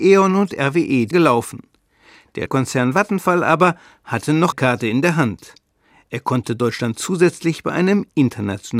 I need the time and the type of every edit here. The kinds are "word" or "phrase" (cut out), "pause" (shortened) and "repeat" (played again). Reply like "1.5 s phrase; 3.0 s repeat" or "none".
1.1 s word; 2.5 s word; 4.5 s word

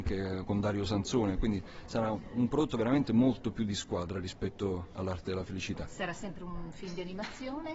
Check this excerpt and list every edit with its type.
none

